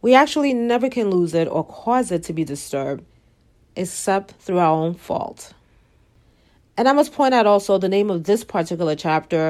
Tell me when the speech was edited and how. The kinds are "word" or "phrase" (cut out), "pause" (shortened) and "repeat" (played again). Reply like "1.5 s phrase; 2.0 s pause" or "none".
none